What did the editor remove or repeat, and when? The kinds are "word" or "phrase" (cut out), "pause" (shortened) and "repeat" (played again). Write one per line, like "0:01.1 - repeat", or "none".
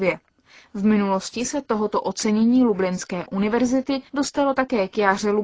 0:04.1 - pause